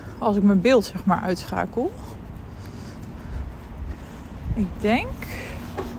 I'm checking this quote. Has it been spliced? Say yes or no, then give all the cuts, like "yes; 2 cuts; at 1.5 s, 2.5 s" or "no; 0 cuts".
no; 0 cuts